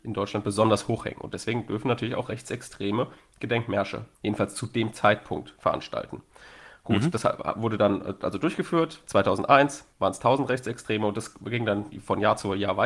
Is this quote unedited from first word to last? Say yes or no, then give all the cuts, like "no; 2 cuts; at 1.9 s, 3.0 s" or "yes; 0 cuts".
no; 2 cuts; at 4.1 s, 9.9 s